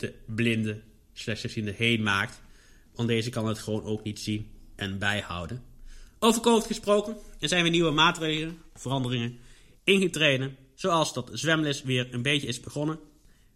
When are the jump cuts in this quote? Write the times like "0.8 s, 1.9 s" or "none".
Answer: none